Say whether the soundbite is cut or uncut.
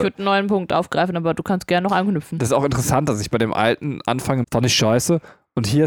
cut